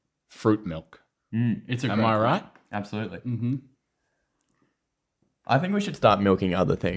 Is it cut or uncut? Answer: uncut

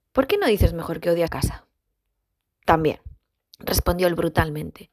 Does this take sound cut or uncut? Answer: cut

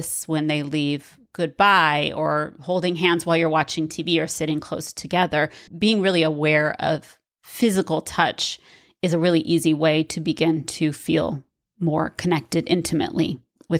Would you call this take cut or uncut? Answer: cut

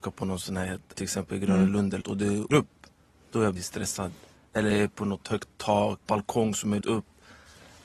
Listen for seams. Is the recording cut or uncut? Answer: cut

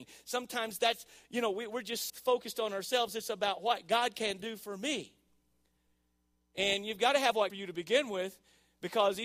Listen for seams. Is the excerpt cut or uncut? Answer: cut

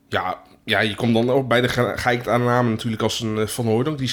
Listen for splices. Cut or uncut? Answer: uncut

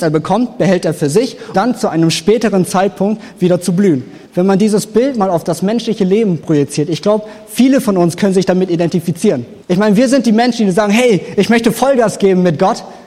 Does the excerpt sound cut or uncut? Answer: cut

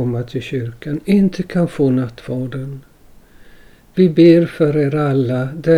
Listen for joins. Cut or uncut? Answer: uncut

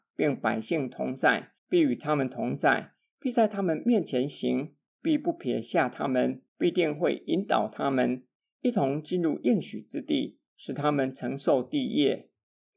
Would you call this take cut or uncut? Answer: cut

